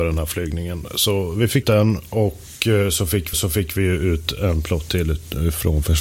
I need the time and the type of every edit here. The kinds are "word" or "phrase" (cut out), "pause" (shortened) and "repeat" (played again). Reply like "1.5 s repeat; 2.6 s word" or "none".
1.6 s word; 3.3 s repeat